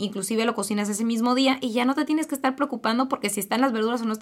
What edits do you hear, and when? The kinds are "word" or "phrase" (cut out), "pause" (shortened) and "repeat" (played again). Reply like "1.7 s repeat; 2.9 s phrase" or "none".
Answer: none